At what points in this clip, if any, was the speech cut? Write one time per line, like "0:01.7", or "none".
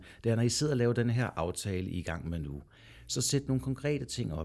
none